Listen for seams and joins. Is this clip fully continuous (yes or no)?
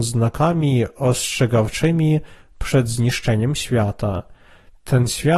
yes